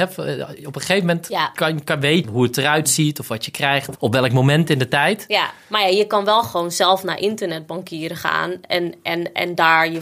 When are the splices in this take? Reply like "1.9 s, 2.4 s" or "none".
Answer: 2.2 s, 3.9 s